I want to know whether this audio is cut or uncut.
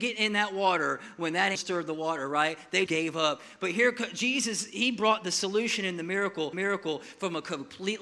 cut